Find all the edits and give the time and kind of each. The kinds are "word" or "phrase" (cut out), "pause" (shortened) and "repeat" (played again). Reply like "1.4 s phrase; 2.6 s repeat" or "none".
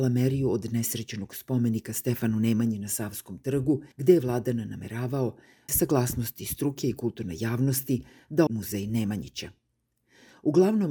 3.9 s pause; 5.7 s word; 8.5 s word